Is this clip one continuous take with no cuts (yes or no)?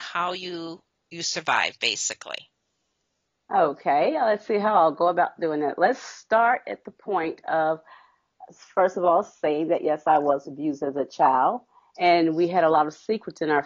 yes